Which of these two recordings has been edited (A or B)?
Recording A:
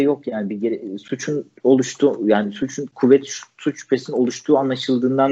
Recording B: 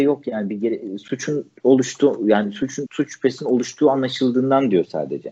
B